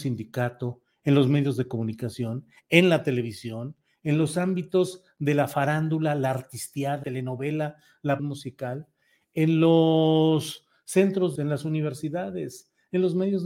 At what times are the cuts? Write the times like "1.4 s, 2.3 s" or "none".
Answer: 7.0 s, 8.2 s, 11.4 s